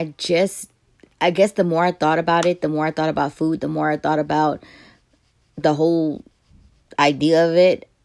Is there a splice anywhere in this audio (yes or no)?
yes